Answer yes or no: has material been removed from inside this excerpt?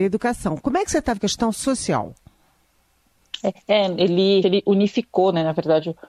yes